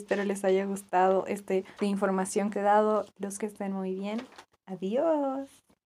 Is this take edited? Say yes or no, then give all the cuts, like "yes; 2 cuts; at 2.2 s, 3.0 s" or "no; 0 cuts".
yes; 3 cuts; at 1.8 s, 2.5 s, 3.4 s